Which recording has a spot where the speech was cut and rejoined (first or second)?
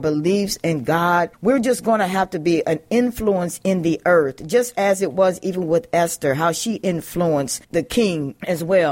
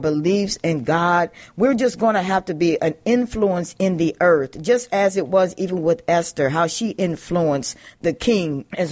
first